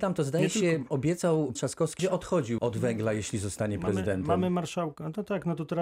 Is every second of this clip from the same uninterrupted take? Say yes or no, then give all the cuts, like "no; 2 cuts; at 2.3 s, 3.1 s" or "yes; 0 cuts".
no; 3 cuts; at 1.5 s, 2.0 s, 2.6 s